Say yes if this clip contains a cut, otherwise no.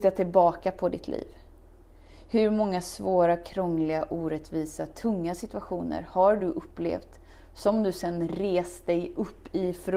no